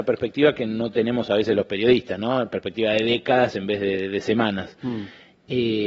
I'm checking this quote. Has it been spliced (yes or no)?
no